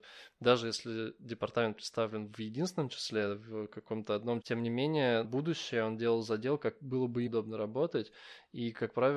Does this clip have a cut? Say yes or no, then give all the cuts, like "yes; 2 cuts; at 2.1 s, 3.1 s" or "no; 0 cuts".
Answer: yes; 3 cuts; at 4.4 s, 5.2 s, 7.3 s